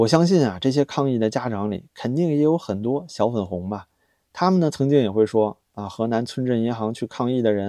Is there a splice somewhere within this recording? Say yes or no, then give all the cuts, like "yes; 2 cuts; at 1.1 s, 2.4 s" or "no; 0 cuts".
no; 0 cuts